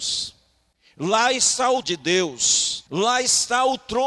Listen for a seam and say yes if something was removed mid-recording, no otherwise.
yes